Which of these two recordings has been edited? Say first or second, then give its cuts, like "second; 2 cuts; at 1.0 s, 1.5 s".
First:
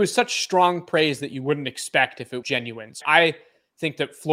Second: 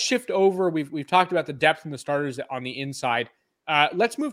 first; 2 cuts; at 2.4 s, 3.0 s